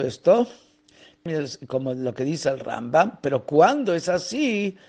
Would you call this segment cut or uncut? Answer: cut